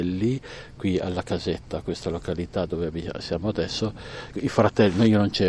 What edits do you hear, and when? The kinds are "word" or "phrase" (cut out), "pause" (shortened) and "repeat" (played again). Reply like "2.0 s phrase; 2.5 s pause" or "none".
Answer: none